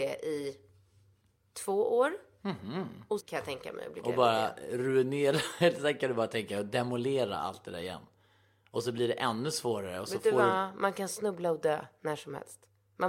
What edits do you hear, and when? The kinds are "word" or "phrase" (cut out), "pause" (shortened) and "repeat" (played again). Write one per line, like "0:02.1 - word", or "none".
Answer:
0:03.2 - word